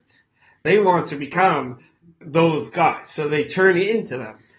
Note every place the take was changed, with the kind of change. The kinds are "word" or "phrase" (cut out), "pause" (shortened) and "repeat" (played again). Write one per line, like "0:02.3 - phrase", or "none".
none